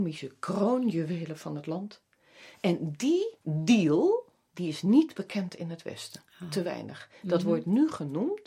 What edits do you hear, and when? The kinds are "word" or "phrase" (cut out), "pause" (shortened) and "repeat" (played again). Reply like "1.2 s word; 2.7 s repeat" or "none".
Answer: 3.4 s pause